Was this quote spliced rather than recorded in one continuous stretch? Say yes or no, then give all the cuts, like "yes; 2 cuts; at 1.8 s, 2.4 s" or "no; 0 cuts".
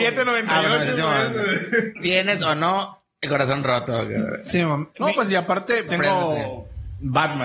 yes; 1 cut; at 5.9 s